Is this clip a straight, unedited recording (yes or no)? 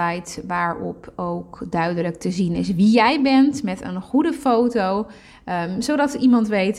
yes